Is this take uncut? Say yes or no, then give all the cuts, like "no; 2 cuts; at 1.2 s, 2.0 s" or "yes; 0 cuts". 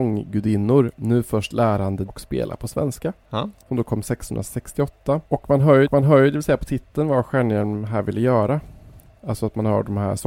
no; 4 cuts; at 2.1 s, 3.2 s, 5.3 s, 5.8 s